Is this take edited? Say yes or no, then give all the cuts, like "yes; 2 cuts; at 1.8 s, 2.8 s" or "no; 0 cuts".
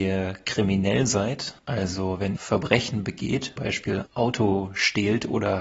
yes; 4 cuts; at 1.6 s, 2.4 s, 3.6 s, 4.1 s